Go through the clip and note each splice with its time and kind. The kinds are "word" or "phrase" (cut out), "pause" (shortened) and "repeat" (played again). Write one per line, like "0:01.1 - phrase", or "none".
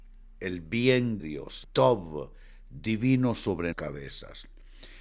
0:01.2 - word
0:01.6 - word
0:03.7 - word